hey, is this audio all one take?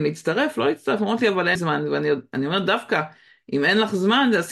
no; 1 cut; at 1.6 s

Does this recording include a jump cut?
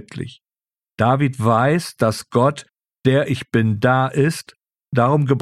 no; 0 cuts

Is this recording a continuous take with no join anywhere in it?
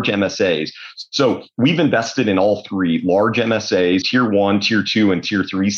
no; 1 cut; at 4.0 s

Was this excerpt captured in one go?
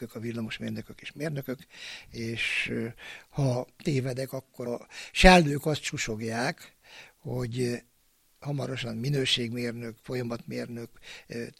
no; 2 cuts; at 3.8 s, 4.7 s

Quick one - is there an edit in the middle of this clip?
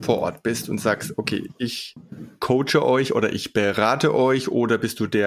no; 0 cuts

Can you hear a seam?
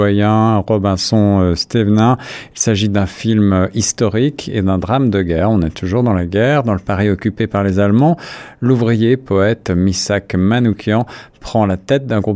no; 0 cuts

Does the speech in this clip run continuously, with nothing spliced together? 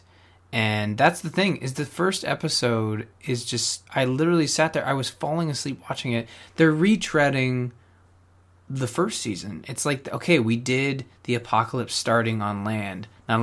no; 1 cut; at 3.9 s

